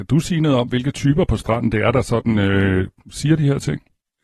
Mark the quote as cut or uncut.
uncut